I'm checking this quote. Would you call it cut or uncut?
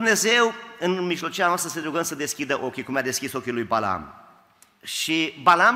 uncut